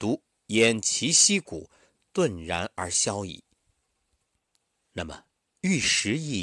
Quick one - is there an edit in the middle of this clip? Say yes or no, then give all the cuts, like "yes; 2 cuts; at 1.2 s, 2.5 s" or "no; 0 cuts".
no; 0 cuts